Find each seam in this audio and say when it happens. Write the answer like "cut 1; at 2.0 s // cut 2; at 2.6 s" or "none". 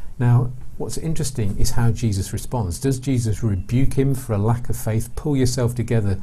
none